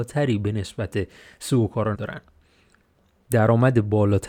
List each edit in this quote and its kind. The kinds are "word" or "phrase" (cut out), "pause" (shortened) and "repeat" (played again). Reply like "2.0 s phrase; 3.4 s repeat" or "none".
1.9 s word